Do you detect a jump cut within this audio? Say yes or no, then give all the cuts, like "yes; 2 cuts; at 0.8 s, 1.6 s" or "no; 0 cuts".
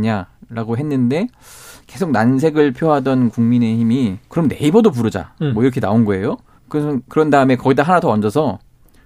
yes; 2 cuts; at 4.2 s, 6.6 s